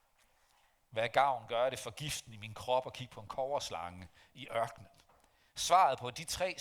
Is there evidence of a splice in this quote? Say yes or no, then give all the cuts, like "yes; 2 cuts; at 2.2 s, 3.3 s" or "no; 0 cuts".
no; 0 cuts